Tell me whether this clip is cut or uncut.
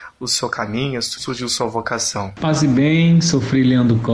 cut